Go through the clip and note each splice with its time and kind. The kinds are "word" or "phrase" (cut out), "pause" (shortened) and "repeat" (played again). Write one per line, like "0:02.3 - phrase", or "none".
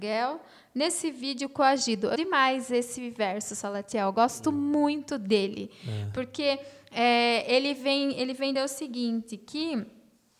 0:02.2 - word
0:08.6 - word